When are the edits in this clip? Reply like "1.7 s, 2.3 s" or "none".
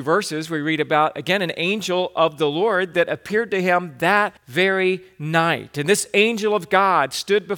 4.4 s